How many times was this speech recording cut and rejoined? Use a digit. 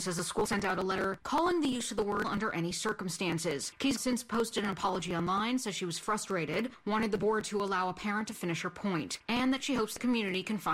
2